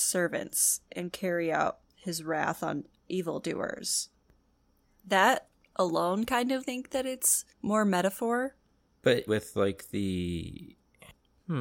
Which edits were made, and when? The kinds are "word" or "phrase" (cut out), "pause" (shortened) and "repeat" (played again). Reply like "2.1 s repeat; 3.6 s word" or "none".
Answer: 1.9 s pause; 6.6 s phrase; 7.5 s pause; 9.3 s word